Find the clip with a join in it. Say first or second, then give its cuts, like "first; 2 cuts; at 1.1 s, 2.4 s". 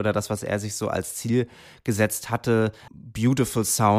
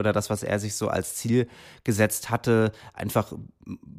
first; 1 cut; at 2.9 s